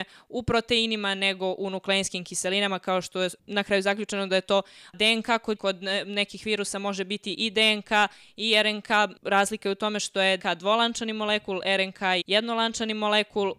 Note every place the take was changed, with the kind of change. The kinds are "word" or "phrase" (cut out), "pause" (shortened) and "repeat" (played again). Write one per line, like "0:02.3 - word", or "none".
0:05.5 - word
0:10.4 - word
0:12.2 - word